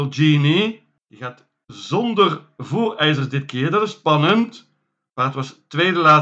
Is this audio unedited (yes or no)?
yes